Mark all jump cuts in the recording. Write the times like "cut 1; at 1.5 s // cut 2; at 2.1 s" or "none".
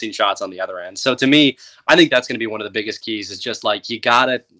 none

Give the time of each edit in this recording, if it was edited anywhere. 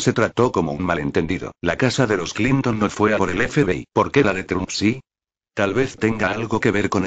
cut 1; at 1.6 s // cut 2; at 3.2 s // cut 3; at 3.9 s

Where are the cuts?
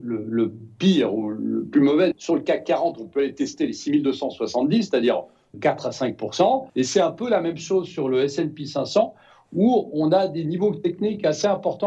cut 1; at 2.1 s // cut 2; at 5.5 s // cut 3; at 6.7 s

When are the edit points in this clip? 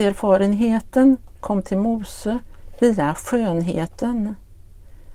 none

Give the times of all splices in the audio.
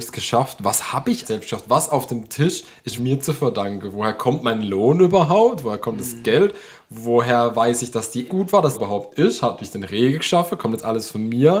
cut 1; at 1.2 s // cut 2; at 3.0 s // cut 3; at 8.3 s // cut 4; at 8.7 s

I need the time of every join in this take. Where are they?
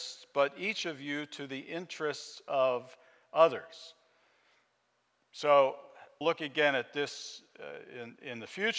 cut 1; at 6.2 s

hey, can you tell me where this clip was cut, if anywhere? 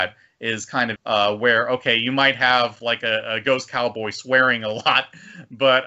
cut 1; at 1.0 s

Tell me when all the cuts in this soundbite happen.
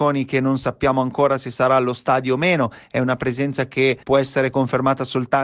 cut 1; at 4.0 s

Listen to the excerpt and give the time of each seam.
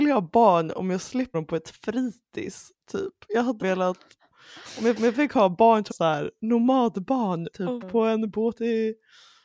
cut 1; at 1.3 s // cut 2; at 3.6 s // cut 3; at 5.0 s // cut 4; at 5.9 s // cut 5; at 7.5 s // cut 6; at 7.8 s

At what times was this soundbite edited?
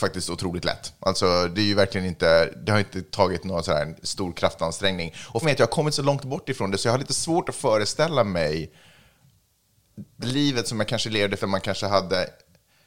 cut 1; at 5.4 s // cut 2; at 10.2 s // cut 3; at 11.4 s

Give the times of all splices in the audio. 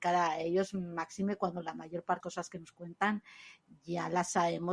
cut 1; at 2.2 s

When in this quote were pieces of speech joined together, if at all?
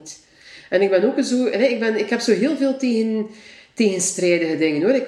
none

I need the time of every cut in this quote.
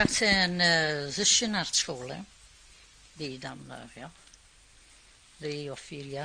cut 1; at 2.8 s

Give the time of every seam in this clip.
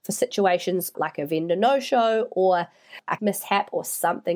cut 1; at 0.9 s // cut 2; at 3.2 s

